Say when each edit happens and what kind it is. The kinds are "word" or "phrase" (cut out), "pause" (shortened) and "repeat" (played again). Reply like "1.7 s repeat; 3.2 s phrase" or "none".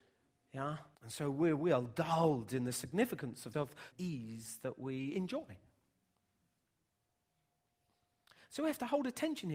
1.0 s pause; 3.5 s phrase; 3.9 s phrase